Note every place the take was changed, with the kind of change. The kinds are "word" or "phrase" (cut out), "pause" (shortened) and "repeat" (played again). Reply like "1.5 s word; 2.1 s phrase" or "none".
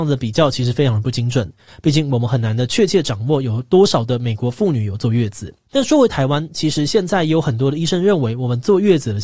5.6 s pause